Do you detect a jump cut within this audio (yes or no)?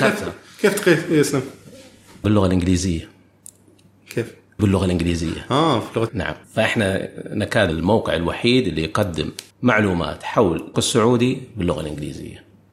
yes